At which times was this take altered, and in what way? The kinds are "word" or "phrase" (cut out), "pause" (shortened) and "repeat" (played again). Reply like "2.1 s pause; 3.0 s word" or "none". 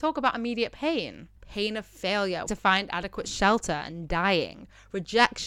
1.4 s pause; 2.5 s phrase